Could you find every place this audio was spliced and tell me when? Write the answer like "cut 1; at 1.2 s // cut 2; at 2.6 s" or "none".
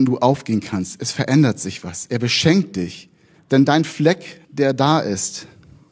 cut 1; at 3.3 s // cut 2; at 4.4 s